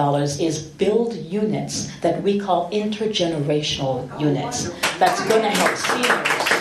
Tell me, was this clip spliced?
no; 0 cuts

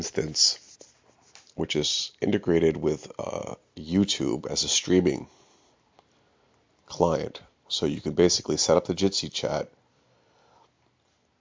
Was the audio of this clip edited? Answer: no; 0 cuts

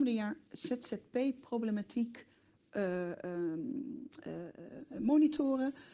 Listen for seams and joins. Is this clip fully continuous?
yes; 0 cuts

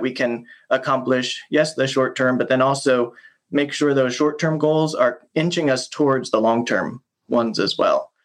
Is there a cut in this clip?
no; 0 cuts

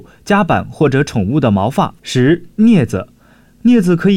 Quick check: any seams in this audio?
yes; 1 cut; at 2.0 s

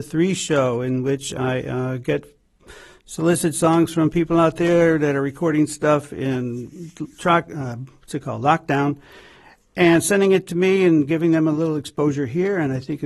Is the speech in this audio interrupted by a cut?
no; 0 cuts

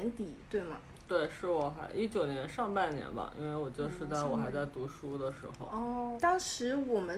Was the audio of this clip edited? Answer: yes; 1 cut; at 6.2 s

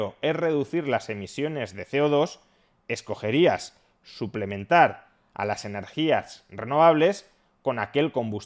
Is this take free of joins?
yes; 0 cuts

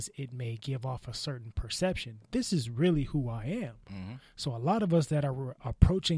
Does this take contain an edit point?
no; 0 cuts

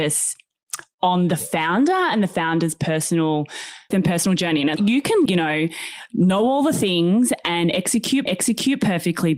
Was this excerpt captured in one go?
no; 4 cuts; at 3.9 s, 4.8 s, 5.3 s, 8.3 s

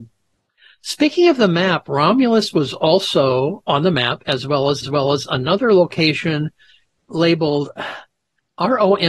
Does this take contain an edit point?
yes; 1 cut; at 4.8 s

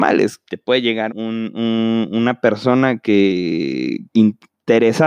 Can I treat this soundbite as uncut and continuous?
no; 2 cuts; at 1.1 s, 4.1 s

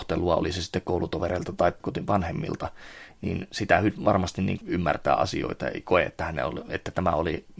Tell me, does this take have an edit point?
yes; 2 cuts; at 1.8 s, 4.6 s

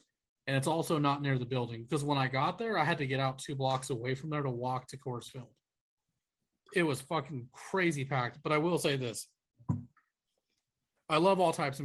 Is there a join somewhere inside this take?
no; 0 cuts

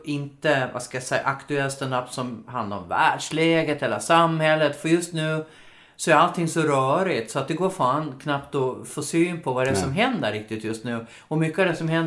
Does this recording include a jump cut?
no; 0 cuts

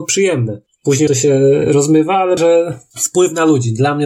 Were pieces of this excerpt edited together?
yes; 2 cuts; at 1.1 s, 2.4 s

